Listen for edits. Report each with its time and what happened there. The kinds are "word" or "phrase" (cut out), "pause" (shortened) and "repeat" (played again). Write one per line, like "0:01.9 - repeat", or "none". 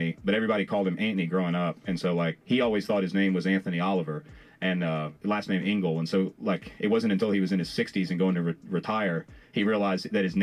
0:02.4 - pause
0:05.2 - pause